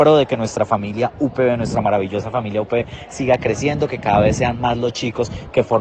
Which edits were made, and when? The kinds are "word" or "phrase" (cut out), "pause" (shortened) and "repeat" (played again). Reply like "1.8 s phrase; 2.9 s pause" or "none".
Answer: none